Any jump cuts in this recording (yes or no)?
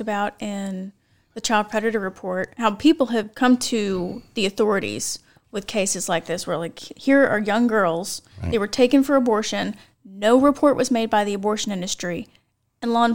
no